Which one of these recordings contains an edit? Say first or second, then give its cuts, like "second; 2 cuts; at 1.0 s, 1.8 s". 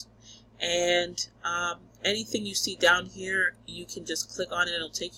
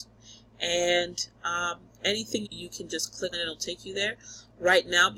second; 2 cuts; at 2.4 s, 3.3 s